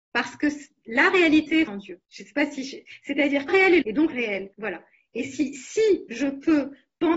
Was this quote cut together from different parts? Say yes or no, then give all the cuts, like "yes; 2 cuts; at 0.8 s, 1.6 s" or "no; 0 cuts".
yes; 6 cuts; at 1.7 s, 2.1 s, 3.5 s, 3.8 s, 4.1 s, 4.5 s